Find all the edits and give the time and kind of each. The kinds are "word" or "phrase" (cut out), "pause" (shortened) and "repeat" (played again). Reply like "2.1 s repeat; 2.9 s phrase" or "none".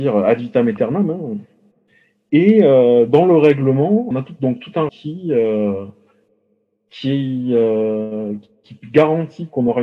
4.1 s word; 4.9 s word